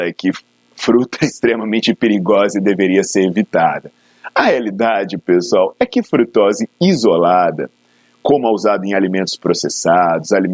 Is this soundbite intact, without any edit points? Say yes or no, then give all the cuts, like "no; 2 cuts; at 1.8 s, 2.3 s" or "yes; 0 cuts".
yes; 0 cuts